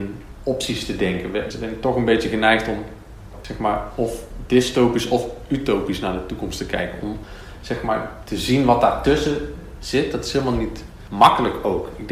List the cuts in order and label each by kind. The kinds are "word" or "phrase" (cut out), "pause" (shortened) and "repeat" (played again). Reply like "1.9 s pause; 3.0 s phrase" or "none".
1.5 s word; 8.3 s word